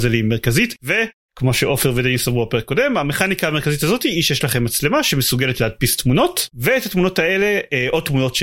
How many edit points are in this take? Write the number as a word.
zero